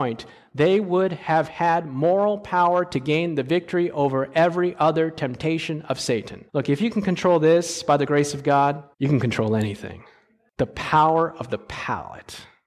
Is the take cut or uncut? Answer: cut